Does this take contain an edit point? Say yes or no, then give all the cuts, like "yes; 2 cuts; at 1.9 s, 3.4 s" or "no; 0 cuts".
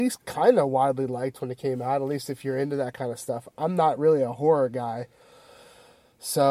no; 0 cuts